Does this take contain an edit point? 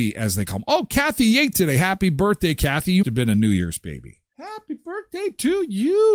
yes; 3 cuts; at 1.5 s, 3.0 s, 4.3 s

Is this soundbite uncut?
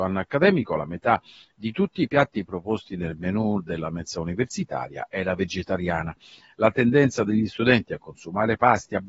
yes; 0 cuts

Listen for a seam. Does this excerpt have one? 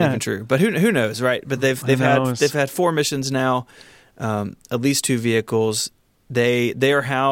no; 0 cuts

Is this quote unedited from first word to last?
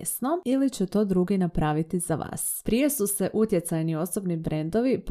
yes; 0 cuts

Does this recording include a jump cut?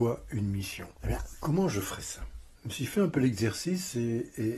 yes; 1 cut; at 0.9 s

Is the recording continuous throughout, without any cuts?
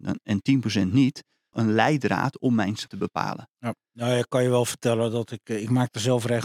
no; 2 cuts; at 1.5 s, 2.9 s

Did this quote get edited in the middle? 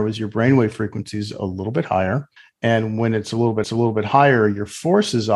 yes; 2 cuts; at 2.4 s, 3.6 s

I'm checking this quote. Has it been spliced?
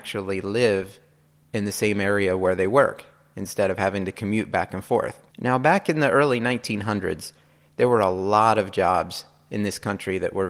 yes; 1 cut; at 5.3 s

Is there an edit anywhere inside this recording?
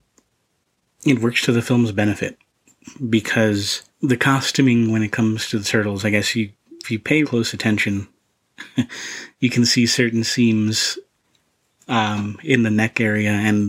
yes; 3 cuts; at 3.9 s, 6.8 s, 7.2 s

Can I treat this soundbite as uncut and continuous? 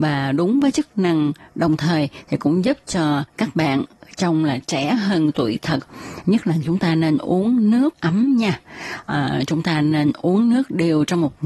yes; 0 cuts

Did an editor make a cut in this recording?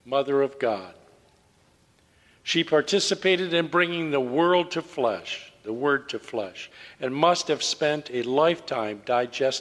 no; 0 cuts

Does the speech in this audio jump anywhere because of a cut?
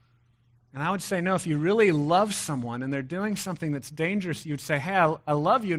no; 0 cuts

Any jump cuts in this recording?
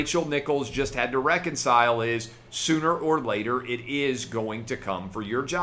no; 0 cuts

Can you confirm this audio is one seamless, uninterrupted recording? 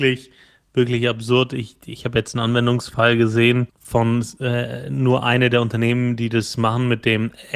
no; 1 cut; at 3.7 s

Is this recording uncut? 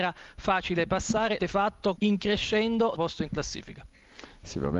no; 3 cuts; at 1.4 s, 1.9 s, 2.9 s

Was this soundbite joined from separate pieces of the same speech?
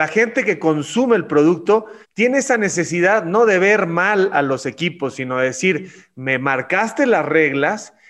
yes; 1 cut; at 2.0 s

